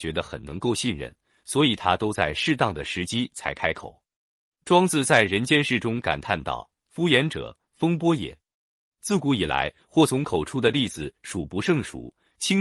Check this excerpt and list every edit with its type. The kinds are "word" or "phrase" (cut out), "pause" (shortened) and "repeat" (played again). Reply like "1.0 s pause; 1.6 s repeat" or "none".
none